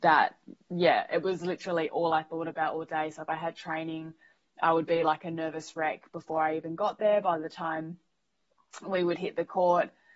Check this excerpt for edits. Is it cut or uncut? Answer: uncut